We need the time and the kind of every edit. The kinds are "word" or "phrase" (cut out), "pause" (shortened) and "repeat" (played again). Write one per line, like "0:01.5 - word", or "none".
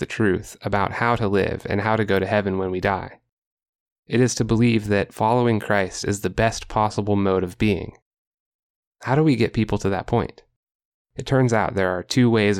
none